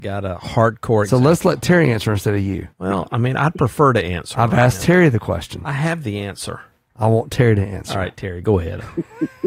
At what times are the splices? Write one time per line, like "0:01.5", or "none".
0:02.7